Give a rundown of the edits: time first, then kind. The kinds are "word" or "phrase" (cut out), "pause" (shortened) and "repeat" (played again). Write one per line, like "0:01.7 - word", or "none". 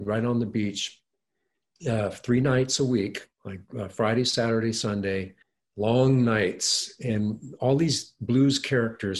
0:03.3 - pause
0:05.4 - pause